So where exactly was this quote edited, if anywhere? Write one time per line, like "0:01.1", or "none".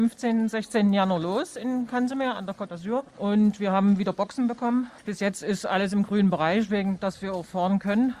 0:03.1
0:05.0